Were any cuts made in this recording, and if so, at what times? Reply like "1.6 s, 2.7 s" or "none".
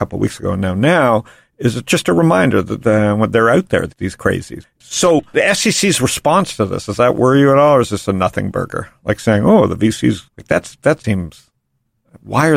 10.3 s, 11.0 s